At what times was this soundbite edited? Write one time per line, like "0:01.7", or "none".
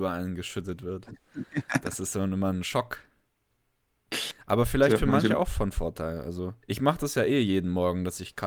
0:06.6